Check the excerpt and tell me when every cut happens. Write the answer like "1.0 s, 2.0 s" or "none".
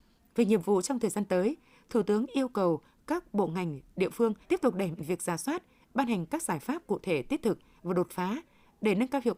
4.4 s, 5.0 s